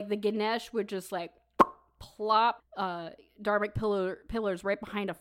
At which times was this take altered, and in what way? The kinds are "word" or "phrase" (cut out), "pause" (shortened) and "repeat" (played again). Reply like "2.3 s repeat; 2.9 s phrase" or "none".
2.6 s word